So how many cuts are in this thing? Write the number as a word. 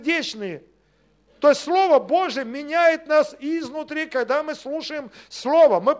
zero